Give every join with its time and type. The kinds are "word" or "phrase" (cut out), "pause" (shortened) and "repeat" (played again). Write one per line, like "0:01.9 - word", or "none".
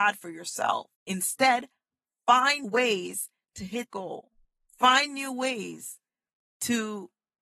0:00.9 - pause
0:02.6 - word
0:03.9 - word
0:04.4 - pause